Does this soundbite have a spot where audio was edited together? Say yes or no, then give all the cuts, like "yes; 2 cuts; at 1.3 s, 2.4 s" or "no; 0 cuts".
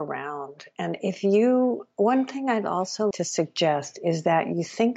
yes; 1 cut; at 3.1 s